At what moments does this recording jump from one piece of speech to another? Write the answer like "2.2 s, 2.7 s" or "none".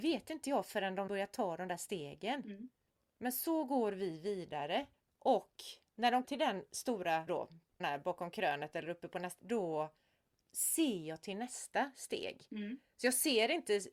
1.1 s, 2.9 s, 4.9 s, 6.2 s, 7.3 s, 7.8 s, 9.4 s